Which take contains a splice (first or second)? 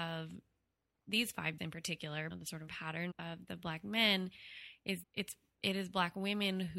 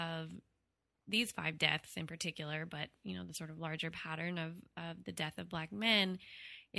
first